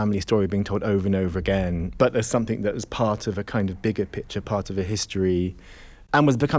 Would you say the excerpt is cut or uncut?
uncut